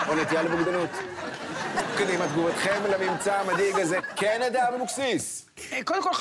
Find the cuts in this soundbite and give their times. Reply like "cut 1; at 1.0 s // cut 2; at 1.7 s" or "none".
none